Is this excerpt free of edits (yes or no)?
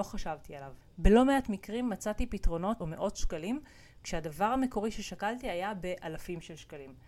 no